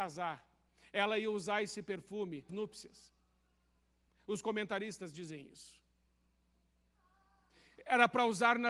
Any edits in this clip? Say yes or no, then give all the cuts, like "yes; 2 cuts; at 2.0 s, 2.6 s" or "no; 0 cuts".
yes; 1 cut; at 2.5 s